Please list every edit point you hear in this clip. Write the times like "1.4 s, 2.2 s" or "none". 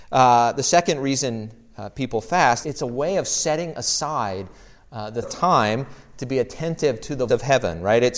2.6 s, 5.2 s, 7.3 s